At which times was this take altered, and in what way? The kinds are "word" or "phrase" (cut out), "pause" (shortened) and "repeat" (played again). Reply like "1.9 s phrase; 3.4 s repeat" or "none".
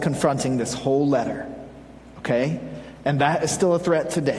none